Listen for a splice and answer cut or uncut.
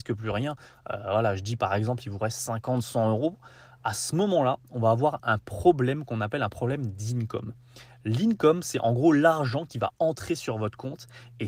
uncut